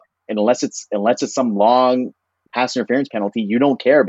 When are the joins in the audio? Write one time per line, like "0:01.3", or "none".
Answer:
0:02.5